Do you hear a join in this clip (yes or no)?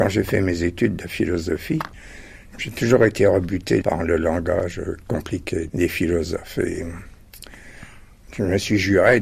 no